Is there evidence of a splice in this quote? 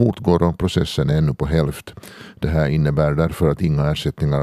no; 0 cuts

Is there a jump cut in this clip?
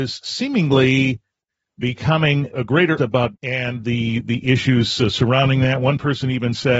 yes; 3 cuts; at 2.5 s, 3.0 s, 3.3 s

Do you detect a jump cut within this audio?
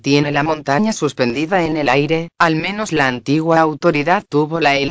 no; 0 cuts

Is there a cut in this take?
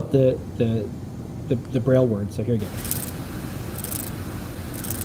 no; 0 cuts

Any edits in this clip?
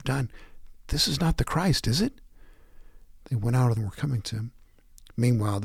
yes; 1 cut; at 3.8 s

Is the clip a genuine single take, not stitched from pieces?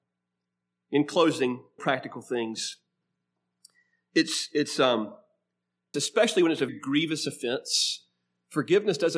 no; 3 cuts; at 1.8 s, 5.9 s, 6.7 s

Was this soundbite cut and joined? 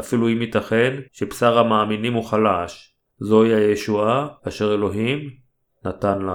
yes; 3 cuts; at 1.1 s, 3.1 s, 4.4 s

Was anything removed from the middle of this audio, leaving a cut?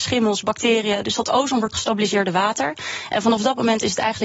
yes; 1 cut; at 1.7 s

